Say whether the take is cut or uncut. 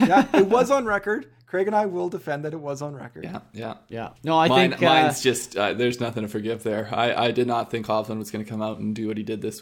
cut